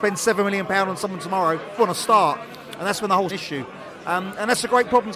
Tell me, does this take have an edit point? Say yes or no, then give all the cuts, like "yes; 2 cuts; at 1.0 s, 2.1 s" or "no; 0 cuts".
yes; 2 cuts; at 1.8 s, 3.3 s